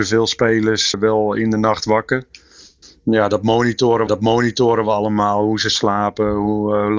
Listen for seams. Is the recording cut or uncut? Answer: cut